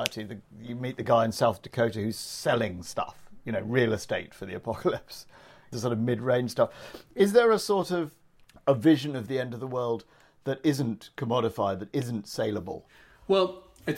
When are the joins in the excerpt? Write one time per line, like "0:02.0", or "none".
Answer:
none